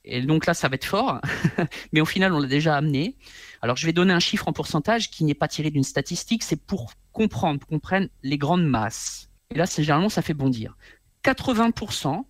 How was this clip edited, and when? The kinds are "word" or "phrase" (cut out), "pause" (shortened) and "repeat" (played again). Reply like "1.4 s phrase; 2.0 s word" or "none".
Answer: 8.2 s pause; 9.4 s pause